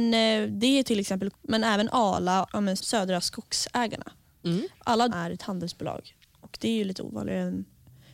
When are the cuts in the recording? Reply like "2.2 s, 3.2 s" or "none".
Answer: 1.3 s, 2.5 s, 2.8 s, 5.1 s